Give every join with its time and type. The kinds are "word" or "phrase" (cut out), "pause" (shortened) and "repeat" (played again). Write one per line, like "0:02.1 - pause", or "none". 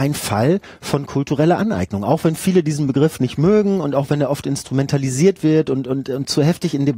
none